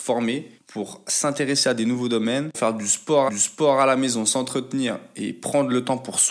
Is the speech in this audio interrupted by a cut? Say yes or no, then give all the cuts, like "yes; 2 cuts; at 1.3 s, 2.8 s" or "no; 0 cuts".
yes; 2 cuts; at 2.5 s, 3.3 s